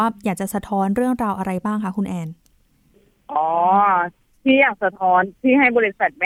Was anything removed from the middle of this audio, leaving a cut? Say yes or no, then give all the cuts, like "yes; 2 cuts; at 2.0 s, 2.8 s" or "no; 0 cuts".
no; 0 cuts